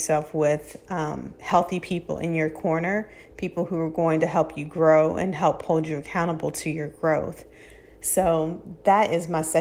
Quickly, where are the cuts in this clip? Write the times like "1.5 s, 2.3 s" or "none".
none